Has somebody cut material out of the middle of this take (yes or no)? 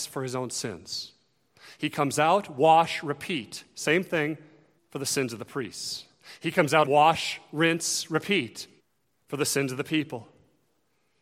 yes